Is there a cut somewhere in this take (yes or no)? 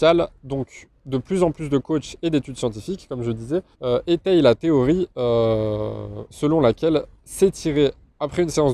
yes